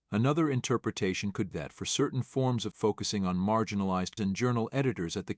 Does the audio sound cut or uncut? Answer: cut